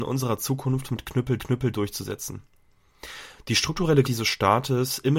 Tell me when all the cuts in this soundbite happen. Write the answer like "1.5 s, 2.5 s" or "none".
1.4 s, 4.0 s